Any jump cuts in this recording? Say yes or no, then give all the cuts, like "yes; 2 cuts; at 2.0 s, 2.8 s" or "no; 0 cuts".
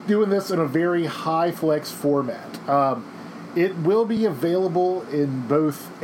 no; 0 cuts